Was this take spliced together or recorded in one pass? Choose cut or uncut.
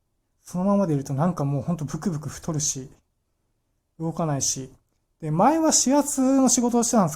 uncut